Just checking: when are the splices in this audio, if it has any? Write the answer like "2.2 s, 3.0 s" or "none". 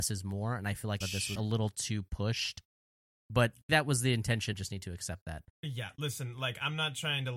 1.0 s, 1.4 s, 3.7 s, 4.5 s, 5.5 s